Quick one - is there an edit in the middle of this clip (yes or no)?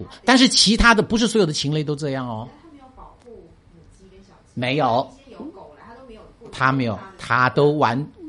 no